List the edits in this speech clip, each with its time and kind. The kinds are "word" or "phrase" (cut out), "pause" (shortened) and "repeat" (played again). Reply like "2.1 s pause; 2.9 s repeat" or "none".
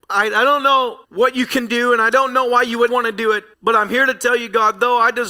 1.0 s pause; 2.9 s word; 3.5 s pause